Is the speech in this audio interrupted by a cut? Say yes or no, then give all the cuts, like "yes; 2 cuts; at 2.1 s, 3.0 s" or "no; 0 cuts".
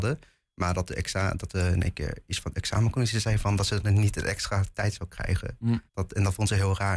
yes; 1 cut; at 5.9 s